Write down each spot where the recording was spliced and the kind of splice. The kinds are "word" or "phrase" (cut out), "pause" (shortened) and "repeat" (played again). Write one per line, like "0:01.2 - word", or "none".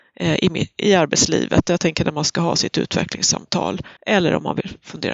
0:04.0 - pause